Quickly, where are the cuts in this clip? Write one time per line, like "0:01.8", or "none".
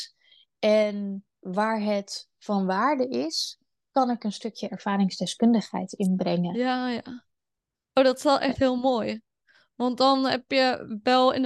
none